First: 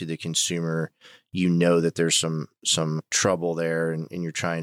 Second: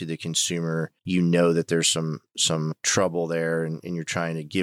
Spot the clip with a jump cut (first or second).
second